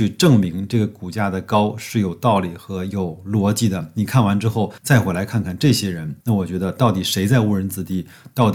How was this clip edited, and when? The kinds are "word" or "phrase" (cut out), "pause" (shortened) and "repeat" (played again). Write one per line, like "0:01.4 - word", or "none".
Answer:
0:04.8 - pause
0:06.2 - pause